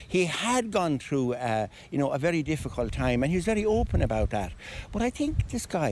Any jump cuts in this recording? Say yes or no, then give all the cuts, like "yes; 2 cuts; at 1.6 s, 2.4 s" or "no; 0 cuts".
no; 0 cuts